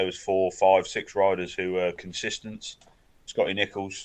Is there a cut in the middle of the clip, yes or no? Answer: no